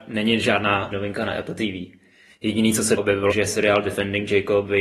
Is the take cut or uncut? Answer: cut